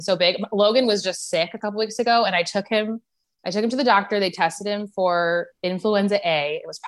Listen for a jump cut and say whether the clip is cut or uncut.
uncut